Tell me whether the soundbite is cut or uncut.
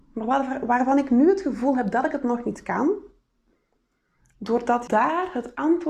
cut